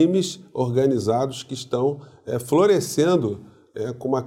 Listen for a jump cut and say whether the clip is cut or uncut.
uncut